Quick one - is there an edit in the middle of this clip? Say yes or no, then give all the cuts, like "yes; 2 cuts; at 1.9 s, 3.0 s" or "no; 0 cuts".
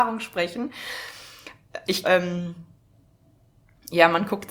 yes; 1 cut; at 2.0 s